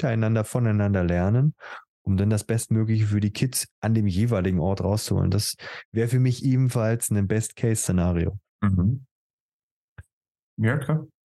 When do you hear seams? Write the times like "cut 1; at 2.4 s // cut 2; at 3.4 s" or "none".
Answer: cut 1; at 3.7 s // cut 2; at 8.5 s